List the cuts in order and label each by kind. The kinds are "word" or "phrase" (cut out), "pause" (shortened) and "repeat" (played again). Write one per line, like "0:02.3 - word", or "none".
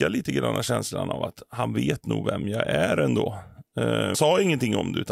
0:04.1 - phrase